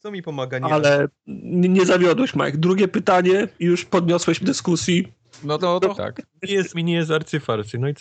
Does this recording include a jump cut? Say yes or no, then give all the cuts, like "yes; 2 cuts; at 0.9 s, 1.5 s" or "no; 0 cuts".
yes; 5 cuts; at 3.5 s, 4.4 s, 5.6 s, 5.9 s, 6.7 s